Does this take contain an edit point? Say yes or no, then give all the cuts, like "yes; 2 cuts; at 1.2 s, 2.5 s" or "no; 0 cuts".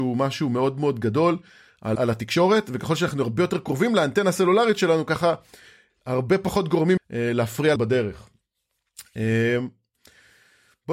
yes; 3 cuts; at 2.0 s, 7.0 s, 7.8 s